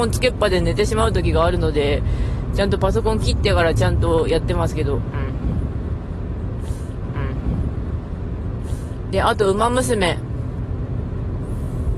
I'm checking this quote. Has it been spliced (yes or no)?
yes